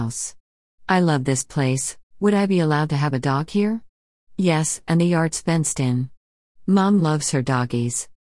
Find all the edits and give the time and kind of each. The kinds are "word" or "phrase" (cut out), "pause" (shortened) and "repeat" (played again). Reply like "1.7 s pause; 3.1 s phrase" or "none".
2.1 s pause